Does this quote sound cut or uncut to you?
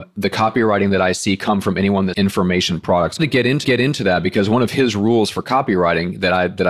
cut